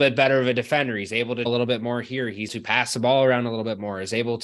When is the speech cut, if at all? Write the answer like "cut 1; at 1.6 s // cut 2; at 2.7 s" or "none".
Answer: cut 1; at 1.5 s // cut 2; at 2.5 s